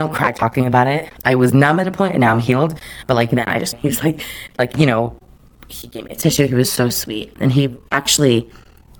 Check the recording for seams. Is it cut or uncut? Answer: cut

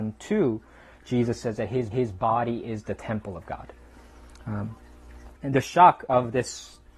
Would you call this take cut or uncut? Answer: cut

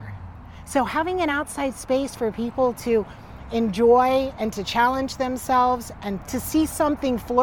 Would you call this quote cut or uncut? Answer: uncut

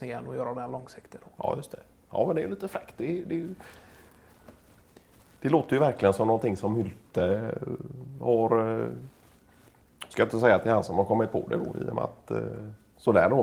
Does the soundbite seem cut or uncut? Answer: uncut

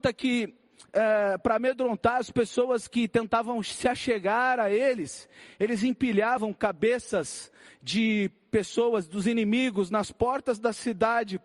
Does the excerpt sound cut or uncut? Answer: uncut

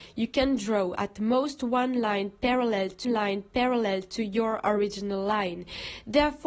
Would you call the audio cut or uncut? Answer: cut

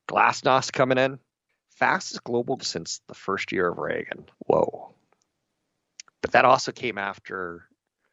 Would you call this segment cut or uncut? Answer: cut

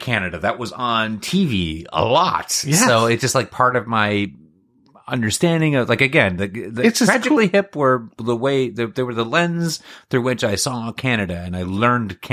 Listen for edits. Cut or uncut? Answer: uncut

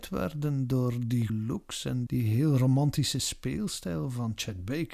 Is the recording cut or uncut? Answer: cut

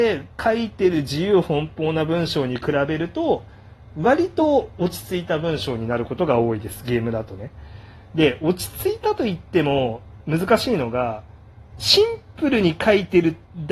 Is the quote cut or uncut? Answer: cut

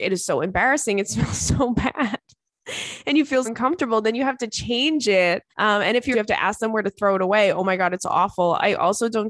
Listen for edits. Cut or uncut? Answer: cut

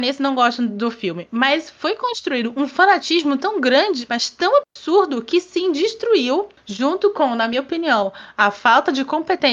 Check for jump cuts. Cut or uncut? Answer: cut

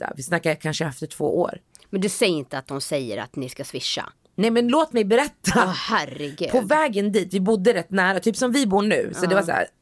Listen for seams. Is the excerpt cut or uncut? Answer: uncut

